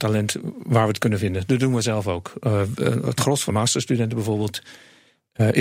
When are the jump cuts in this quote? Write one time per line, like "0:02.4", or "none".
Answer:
0:03.5